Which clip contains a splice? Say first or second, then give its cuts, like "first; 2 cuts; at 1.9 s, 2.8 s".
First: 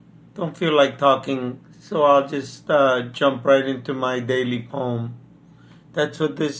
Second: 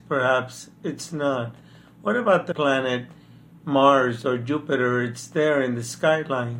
second; 1 cut; at 2.5 s